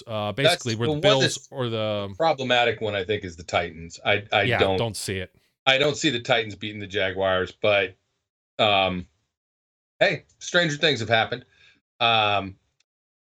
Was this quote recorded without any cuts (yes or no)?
yes